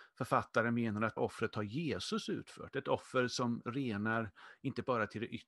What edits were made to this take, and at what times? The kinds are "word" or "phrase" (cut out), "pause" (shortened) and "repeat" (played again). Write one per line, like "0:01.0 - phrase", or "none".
0:01.2 - word